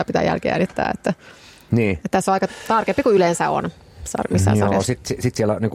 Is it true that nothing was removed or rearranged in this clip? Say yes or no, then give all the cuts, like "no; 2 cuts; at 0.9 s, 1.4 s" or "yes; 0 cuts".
yes; 0 cuts